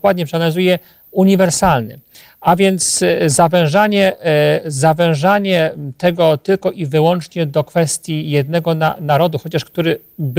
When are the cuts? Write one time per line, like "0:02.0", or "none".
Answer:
none